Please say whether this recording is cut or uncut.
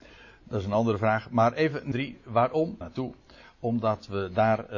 cut